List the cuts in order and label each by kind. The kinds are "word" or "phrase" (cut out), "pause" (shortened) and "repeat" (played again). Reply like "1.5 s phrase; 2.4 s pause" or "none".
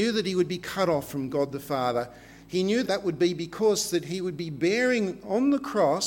2.9 s word